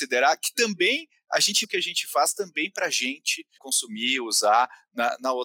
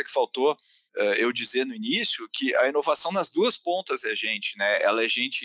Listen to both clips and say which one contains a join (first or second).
first